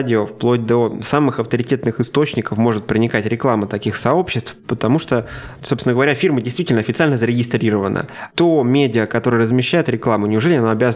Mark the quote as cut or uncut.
uncut